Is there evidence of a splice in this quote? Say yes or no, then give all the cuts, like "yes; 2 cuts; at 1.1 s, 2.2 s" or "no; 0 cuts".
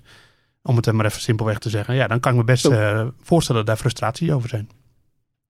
no; 0 cuts